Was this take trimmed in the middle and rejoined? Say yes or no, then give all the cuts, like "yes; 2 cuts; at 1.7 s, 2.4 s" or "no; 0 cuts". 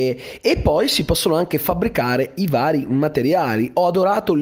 no; 0 cuts